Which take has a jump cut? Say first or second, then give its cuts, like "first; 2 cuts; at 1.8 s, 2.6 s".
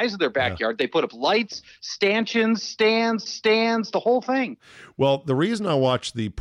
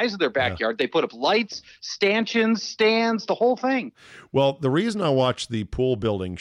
first; 1 cut; at 3.3 s